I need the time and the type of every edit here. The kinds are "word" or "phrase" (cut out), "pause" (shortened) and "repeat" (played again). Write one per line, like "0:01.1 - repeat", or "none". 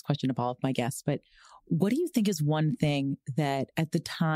none